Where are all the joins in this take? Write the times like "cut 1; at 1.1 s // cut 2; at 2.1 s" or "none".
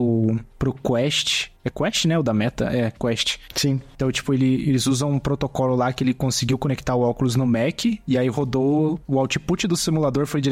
none